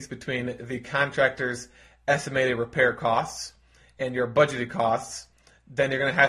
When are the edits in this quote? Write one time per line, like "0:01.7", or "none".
none